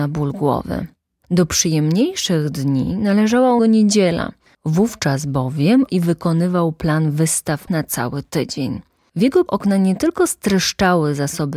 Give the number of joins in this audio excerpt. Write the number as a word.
four